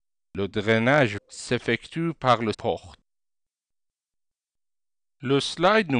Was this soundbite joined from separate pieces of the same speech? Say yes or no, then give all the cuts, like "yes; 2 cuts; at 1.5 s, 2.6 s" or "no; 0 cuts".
yes; 2 cuts; at 1.2 s, 2.5 s